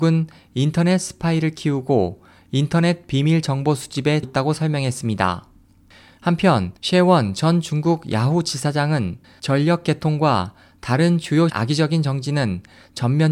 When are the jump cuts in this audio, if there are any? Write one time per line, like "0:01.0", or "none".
0:04.2
0:06.8
0:09.2
0:11.5